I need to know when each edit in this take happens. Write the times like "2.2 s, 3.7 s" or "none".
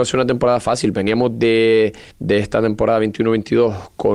2.1 s